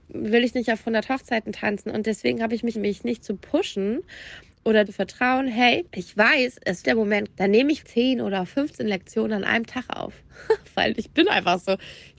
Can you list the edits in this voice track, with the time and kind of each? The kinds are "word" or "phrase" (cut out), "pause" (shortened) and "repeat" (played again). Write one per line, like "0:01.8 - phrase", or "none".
0:02.7 - word
0:04.9 - phrase
0:05.9 - pause
0:06.8 - word
0:07.3 - word
0:07.8 - word

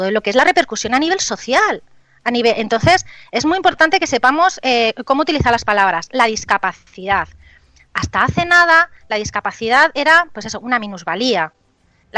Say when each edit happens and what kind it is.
none

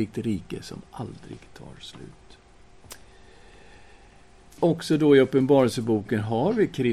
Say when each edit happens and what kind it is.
none

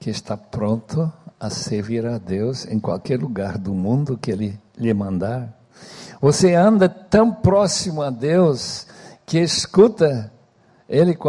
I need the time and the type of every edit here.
0:04.7 - pause

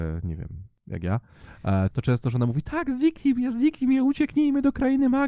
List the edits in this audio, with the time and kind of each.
0:01.9 - word

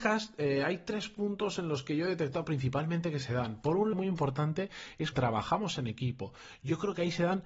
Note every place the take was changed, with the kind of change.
0:03.9 - word
0:05.1 - word

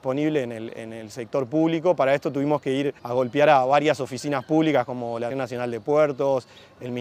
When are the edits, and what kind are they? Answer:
0:03.0 - pause
0:05.3 - word

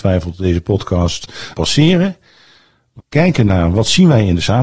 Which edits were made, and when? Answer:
0:01.5 - phrase
0:03.0 - word

